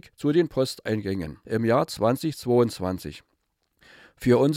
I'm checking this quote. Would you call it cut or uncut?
uncut